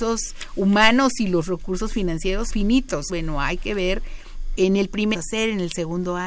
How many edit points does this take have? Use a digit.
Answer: 4